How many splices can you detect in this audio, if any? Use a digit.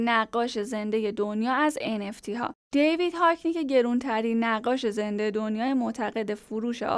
0